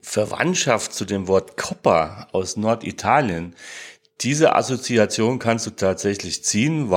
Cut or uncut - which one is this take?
uncut